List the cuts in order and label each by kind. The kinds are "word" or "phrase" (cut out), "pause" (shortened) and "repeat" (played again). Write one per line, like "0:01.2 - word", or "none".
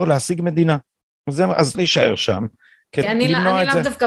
0:01.7 - word
0:03.0 - word